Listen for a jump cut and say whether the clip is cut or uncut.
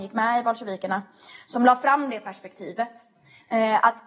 uncut